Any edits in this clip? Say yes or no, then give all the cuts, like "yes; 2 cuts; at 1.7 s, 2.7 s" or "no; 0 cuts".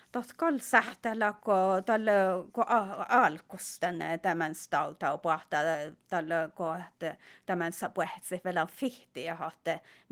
no; 0 cuts